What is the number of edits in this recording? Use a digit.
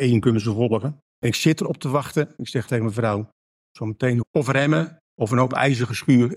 4